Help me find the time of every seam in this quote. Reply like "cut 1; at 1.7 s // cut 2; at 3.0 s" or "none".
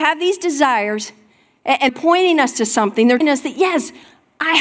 cut 1; at 1.9 s // cut 2; at 3.2 s